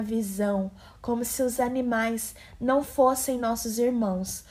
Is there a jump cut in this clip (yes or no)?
no